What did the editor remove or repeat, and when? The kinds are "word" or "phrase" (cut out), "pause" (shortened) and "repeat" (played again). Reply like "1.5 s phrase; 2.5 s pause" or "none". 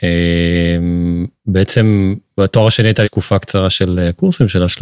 3.0 s word